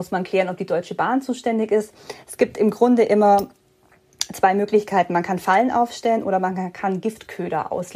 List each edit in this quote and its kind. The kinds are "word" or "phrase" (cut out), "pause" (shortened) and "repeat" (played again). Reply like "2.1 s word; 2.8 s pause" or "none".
none

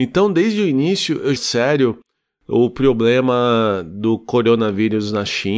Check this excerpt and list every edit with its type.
1.4 s phrase

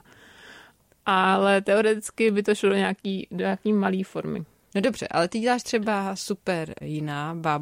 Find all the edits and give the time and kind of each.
none

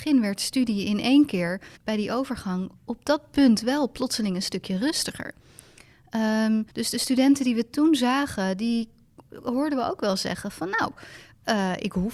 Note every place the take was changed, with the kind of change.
1.8 s pause; 2.8 s pause; 6.7 s pause

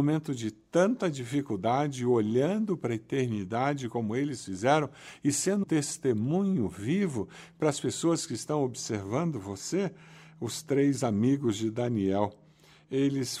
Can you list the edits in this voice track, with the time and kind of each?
5.6 s word

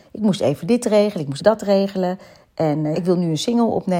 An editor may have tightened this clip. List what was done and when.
1.4 s word; 2.9 s word

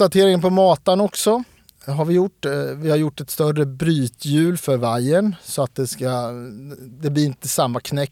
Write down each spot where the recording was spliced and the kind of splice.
6.8 s word

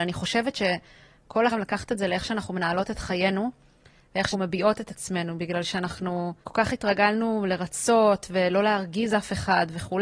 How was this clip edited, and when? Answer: 1.5 s phrase; 4.3 s word; 6.4 s pause

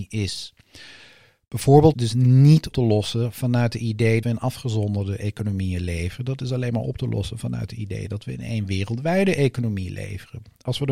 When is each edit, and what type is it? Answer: 1.9 s phrase; 2.7 s word; 4.2 s word

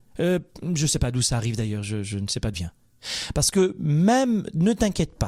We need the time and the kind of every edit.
2.5 s word

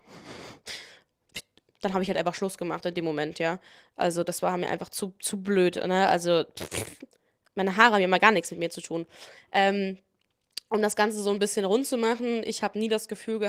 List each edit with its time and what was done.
none

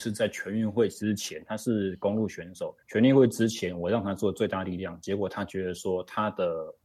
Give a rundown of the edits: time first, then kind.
2.8 s pause

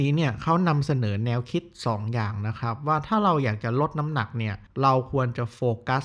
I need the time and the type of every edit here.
4.7 s pause

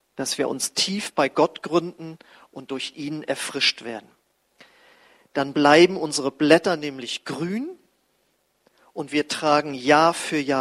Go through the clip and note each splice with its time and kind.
none

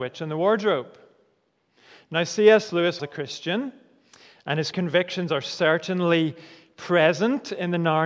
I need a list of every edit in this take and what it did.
3.0 s word; 4.7 s word

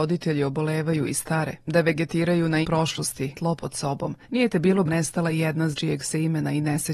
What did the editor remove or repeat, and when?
1.6 s pause; 2.6 s word; 3.3 s word; 4.2 s pause; 4.9 s phrase; 5.7 s phrase

